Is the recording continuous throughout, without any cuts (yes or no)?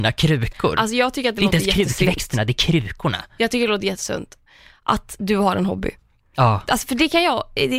yes